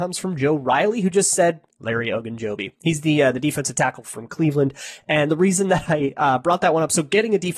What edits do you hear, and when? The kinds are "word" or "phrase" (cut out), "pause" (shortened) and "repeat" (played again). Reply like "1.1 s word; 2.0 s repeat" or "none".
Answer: none